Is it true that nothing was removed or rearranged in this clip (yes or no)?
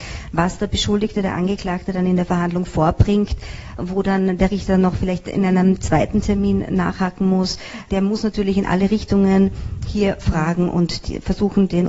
yes